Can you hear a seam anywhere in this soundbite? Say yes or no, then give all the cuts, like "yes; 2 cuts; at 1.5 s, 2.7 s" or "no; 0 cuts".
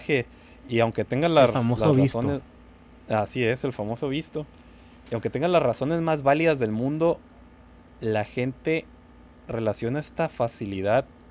no; 0 cuts